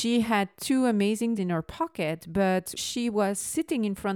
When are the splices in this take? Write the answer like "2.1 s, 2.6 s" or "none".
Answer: 1.4 s, 2.8 s